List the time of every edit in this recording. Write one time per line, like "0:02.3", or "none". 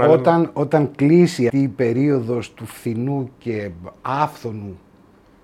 0:01.5